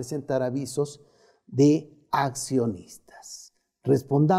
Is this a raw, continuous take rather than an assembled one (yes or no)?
yes